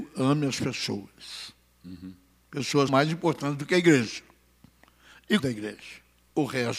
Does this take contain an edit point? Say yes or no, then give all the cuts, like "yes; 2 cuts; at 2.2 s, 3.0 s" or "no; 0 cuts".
yes; 2 cuts; at 2.9 s, 5.4 s